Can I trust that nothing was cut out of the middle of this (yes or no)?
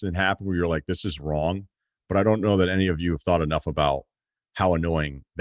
yes